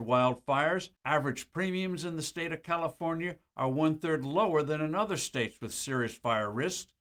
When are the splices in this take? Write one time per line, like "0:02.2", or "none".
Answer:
0:01.0